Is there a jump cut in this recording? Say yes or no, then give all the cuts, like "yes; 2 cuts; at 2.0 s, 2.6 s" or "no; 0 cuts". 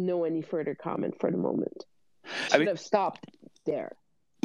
yes; 1 cut; at 2.5 s